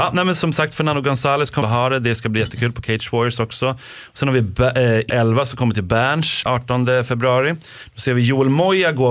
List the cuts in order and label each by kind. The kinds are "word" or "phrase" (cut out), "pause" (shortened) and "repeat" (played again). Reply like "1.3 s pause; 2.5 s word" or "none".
1.6 s phrase; 5.1 s word; 6.4 s word